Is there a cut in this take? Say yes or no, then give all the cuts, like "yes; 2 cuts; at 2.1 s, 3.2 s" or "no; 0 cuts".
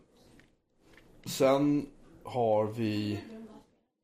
no; 0 cuts